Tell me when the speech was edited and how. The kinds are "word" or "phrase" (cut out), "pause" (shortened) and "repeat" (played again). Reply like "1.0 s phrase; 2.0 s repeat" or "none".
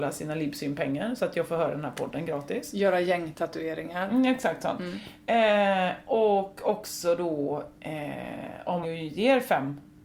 8.8 s word